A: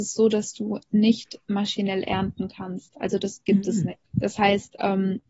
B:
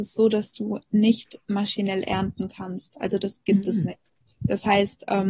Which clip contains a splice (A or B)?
A